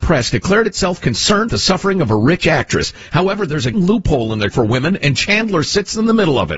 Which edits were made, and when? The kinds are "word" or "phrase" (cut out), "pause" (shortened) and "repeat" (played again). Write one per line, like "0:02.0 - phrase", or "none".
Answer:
0:01.5 - word
0:03.7 - word
0:04.5 - word